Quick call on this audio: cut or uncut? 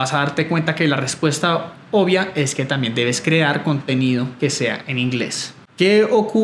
uncut